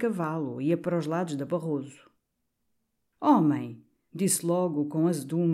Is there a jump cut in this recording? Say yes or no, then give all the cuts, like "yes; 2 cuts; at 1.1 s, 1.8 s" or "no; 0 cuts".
no; 0 cuts